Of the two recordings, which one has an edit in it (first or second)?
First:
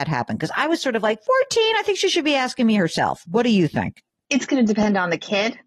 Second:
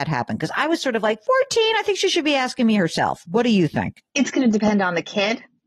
second